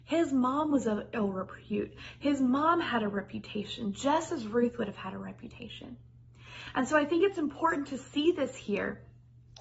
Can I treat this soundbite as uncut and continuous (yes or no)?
yes